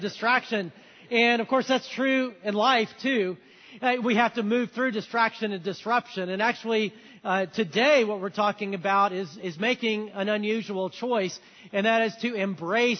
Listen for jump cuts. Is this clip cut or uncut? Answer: uncut